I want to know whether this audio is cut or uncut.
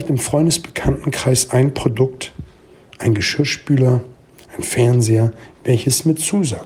uncut